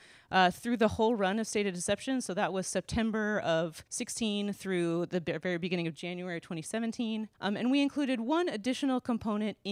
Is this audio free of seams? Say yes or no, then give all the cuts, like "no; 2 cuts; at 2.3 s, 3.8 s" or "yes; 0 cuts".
no; 2 cuts; at 3.9 s, 7.3 s